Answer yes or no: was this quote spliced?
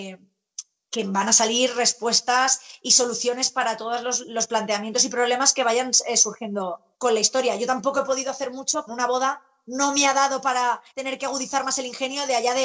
yes